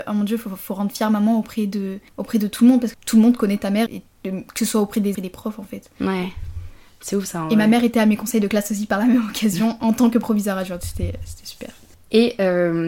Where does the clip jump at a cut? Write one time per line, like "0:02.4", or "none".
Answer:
0:02.1
0:02.9
0:03.9
0:05.1